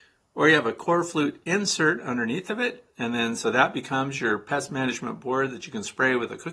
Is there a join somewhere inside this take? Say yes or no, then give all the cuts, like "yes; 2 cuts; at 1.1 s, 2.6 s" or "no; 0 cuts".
no; 0 cuts